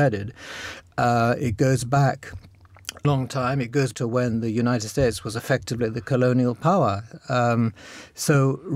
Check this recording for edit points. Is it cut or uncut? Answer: cut